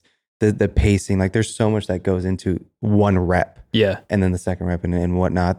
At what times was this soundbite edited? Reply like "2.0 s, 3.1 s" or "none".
none